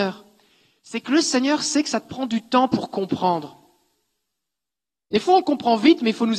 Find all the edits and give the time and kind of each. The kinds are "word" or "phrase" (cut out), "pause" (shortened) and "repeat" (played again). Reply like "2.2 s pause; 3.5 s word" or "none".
none